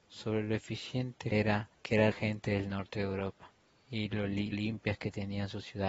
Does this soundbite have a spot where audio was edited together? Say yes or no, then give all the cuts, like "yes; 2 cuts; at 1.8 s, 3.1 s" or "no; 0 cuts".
yes; 5 cuts; at 1.3 s, 1.7 s, 2.1 s, 3.7 s, 4.5 s